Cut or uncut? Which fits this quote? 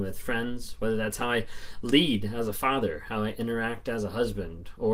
uncut